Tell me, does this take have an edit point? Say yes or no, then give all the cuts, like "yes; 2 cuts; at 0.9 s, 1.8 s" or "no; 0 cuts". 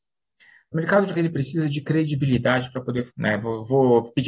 yes; 2 cuts; at 1.1 s, 3.1 s